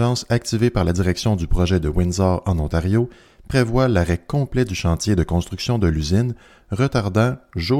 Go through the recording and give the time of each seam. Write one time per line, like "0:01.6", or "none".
none